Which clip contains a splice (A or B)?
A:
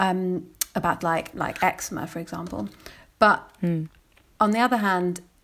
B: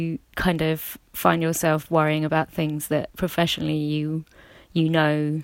A